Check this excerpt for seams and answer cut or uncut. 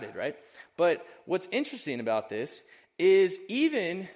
uncut